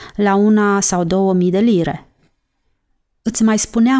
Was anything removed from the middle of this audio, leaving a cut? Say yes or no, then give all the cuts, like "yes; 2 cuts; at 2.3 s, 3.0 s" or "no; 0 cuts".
no; 0 cuts